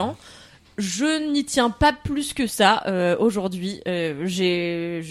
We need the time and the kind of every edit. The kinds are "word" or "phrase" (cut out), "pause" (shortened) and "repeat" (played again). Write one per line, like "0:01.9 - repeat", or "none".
none